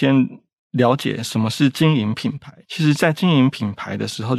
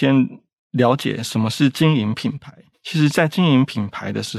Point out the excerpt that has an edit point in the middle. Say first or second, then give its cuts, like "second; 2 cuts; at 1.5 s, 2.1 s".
first; 1 cut; at 2.6 s